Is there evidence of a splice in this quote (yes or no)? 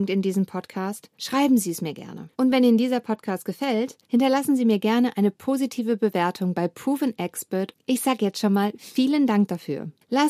yes